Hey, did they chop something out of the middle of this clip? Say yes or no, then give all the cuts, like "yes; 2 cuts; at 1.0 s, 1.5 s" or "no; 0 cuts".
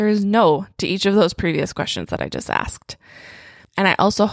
no; 0 cuts